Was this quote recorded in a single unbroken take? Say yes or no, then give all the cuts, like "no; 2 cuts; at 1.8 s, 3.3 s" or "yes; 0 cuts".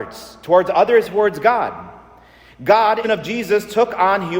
no; 2 cuts; at 1.0 s, 3.0 s